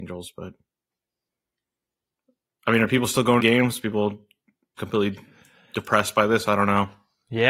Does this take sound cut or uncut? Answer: cut